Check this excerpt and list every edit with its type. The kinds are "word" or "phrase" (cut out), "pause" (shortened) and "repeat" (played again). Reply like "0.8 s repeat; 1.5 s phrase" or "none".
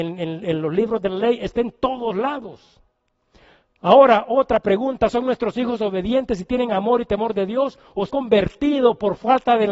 8.1 s word